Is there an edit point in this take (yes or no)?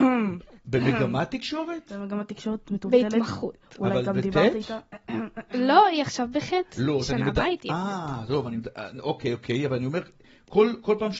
no